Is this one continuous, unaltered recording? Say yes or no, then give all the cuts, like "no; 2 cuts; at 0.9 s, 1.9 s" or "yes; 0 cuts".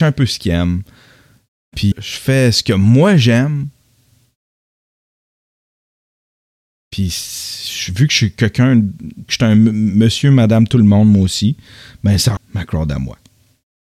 no; 3 cuts; at 1.9 s, 9.3 s, 12.4 s